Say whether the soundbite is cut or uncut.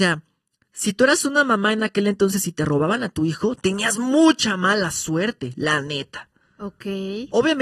uncut